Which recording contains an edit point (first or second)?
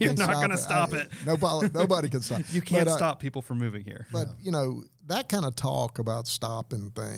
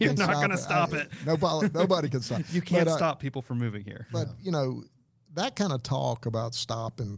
first